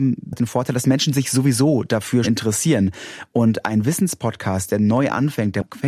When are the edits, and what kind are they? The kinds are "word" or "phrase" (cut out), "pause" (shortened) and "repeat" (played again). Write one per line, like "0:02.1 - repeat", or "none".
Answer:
0:02.2 - word